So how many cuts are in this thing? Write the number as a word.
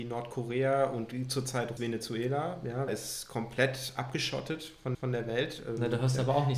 three